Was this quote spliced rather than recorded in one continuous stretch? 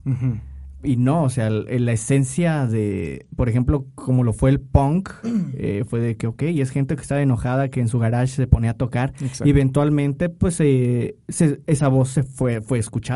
no; 0 cuts

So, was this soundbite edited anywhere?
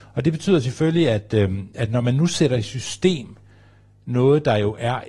no; 0 cuts

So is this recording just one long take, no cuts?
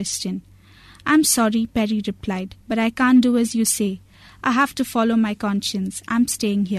yes; 0 cuts

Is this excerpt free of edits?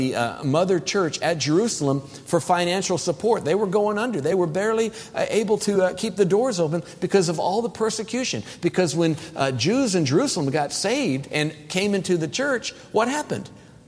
yes; 0 cuts

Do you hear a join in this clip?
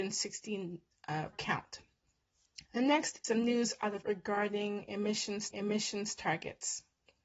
yes; 5 cuts; at 1.3 s, 2.7 s, 3.2 s, 4.0 s, 5.5 s

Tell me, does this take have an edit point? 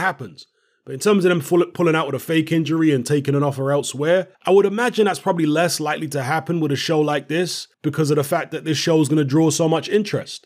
yes; 2 cuts; at 4.3 s, 7.7 s

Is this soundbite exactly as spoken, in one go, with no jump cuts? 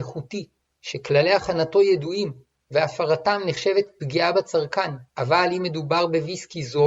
no; 1 cut; at 5.1 s

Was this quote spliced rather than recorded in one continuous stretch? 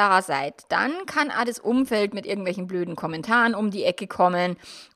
no; 0 cuts

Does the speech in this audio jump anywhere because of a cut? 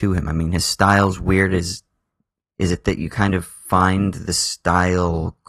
no; 0 cuts

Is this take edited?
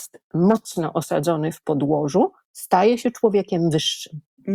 no; 0 cuts

